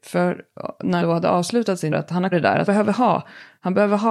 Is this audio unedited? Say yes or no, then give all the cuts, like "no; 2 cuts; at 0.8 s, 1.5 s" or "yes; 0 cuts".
no; 4 cuts; at 1.0 s, 1.9 s, 2.3 s, 2.7 s